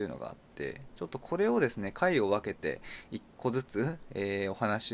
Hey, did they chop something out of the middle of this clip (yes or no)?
yes